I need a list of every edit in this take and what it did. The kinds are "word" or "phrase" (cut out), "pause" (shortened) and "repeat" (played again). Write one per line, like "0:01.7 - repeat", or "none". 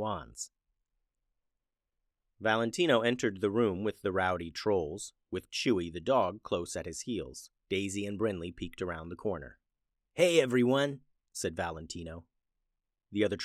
0:07.6 - pause